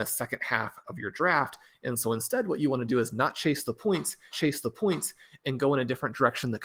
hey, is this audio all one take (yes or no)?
no